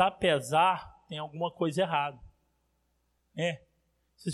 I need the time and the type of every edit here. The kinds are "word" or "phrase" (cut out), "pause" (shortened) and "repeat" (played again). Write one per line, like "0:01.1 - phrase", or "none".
none